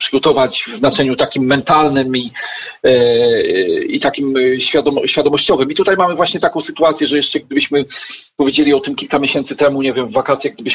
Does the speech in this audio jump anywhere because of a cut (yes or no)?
no